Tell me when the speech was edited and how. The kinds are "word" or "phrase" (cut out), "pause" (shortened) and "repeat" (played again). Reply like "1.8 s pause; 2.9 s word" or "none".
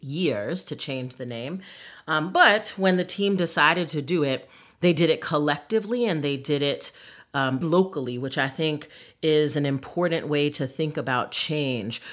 7.6 s word

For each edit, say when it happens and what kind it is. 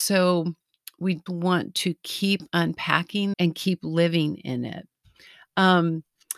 1.3 s word; 3.3 s phrase

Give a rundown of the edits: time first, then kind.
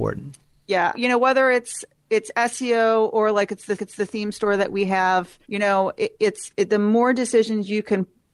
0.9 s word; 3.8 s repeat; 5.4 s pause

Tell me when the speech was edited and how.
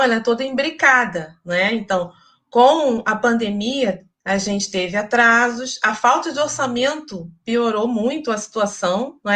none

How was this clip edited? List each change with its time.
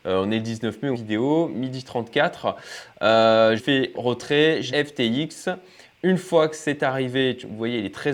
0.9 s phrase; 3.6 s word; 3.9 s word; 4.7 s phrase

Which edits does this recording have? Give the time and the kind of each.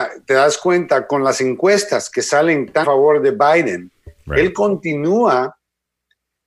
2.8 s word

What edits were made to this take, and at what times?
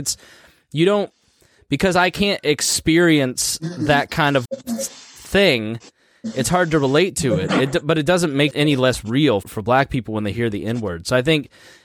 4.4 s word; 8.5 s word; 9.4 s word

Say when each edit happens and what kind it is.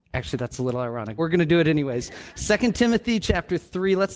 1.2 s word

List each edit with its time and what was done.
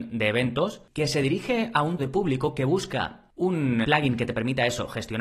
2.0 s word; 3.8 s word

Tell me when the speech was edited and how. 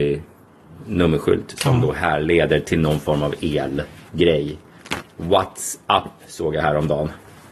none

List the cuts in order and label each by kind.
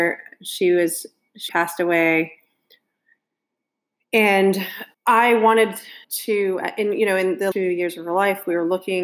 1.5 s word; 4.9 s pause; 6.0 s pause; 7.5 s word

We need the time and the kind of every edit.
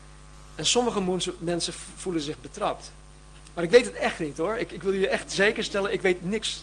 none

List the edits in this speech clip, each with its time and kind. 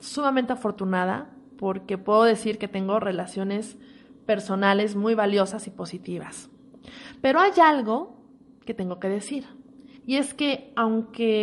10.0 s pause

